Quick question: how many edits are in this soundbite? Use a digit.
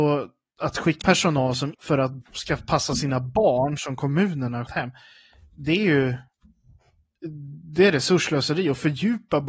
4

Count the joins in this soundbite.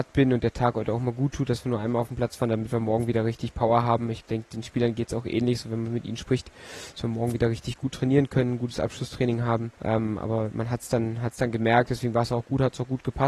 1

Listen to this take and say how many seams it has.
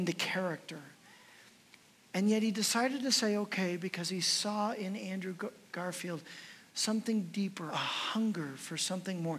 1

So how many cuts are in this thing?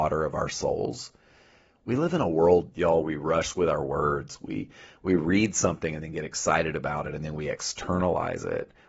1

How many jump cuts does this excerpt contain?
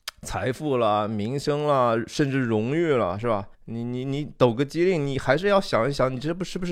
1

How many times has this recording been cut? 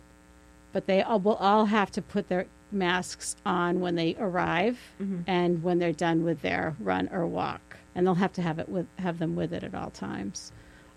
2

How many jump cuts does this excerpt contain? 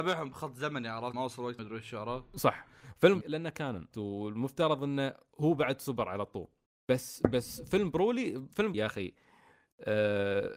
6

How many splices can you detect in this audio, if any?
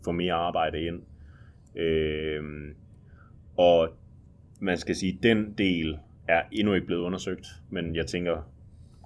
0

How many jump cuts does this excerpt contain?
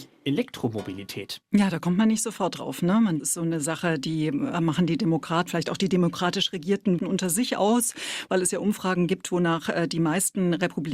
3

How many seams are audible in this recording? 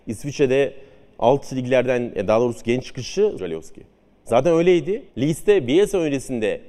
3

